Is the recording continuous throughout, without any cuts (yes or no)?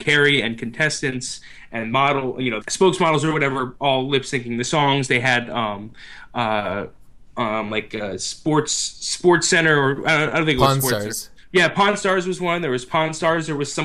no